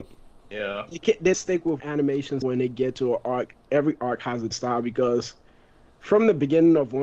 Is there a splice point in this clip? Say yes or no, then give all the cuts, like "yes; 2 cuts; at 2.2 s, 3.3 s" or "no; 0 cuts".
yes; 5 cuts; at 1.0 s, 1.3 s, 1.8 s, 2.4 s, 4.5 s